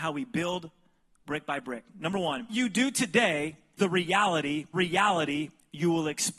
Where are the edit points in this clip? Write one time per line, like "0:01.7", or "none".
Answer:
0:02.5
0:03.8
0:04.7